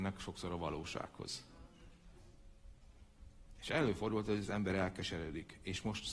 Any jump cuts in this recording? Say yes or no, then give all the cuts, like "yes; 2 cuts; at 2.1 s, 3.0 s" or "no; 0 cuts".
no; 0 cuts